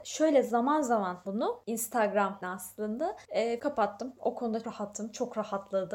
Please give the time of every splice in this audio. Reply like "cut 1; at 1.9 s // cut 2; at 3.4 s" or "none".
cut 1; at 1.2 s // cut 2; at 2.4 s // cut 3; at 3.6 s // cut 4; at 4.6 s